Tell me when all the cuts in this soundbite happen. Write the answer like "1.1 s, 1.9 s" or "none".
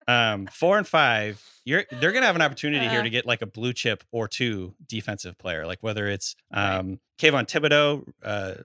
6.4 s, 7.1 s